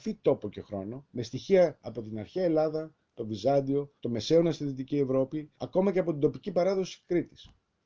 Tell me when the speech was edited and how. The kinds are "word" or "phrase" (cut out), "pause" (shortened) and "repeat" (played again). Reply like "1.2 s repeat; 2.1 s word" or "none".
1.1 s pause; 4.0 s pause; 5.5 s pause